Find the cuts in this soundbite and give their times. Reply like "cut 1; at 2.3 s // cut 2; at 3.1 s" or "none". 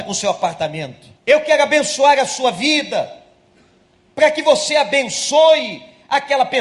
cut 1; at 1.2 s